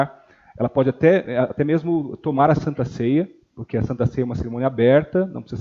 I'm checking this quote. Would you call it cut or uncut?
uncut